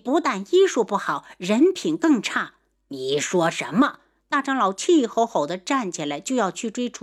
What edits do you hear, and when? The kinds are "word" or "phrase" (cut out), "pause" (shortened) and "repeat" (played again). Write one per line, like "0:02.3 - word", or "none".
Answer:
0:02.7 - pause